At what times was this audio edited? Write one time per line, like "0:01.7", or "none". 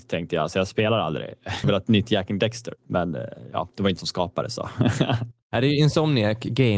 0:01.6
0:02.8
0:04.0
0:05.4